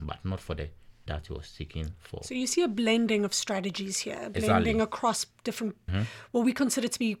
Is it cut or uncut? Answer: cut